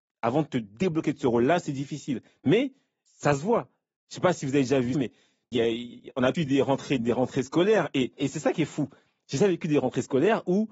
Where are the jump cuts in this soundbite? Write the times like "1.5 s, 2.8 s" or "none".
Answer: 3.1 s, 4.9 s, 5.5 s, 6.3 s, 7.0 s, 8.2 s